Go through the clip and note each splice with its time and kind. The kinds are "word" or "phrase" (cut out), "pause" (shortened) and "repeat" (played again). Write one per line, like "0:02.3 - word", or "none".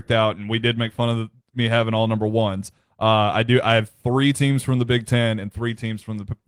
none

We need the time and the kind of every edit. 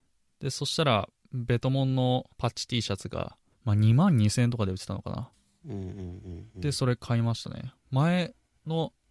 0:02.3 - pause
0:03.5 - pause

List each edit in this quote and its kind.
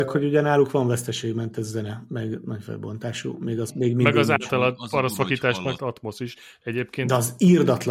0:03.7 - word
0:05.8 - word

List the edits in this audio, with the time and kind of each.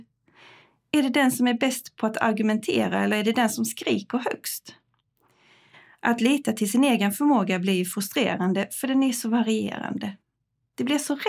none

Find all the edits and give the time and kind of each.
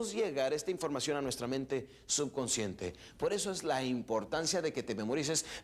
none

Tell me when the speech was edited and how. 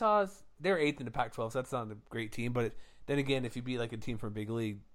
none

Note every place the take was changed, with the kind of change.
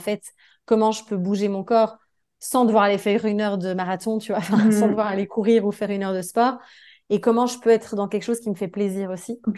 none

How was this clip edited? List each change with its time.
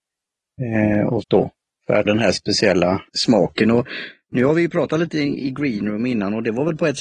0:01.2 - phrase
0:01.7 - pause
0:02.0 - word
0:03.1 - pause

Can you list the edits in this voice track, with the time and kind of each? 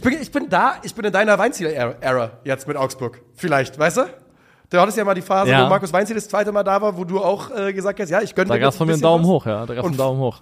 none

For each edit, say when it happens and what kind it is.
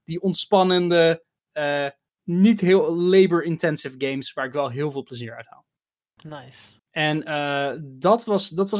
0:06.8 - pause

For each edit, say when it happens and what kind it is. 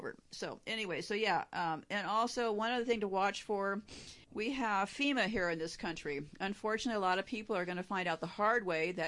0:04.2 - pause

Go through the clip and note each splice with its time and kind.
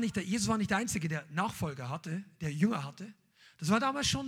none

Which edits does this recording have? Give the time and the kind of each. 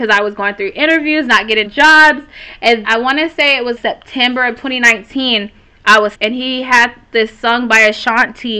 0:01.6 - word
0:02.8 - word
0:03.8 - word
0:06.1 - word

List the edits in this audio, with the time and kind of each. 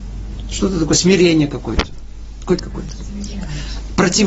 0:02.6 - word

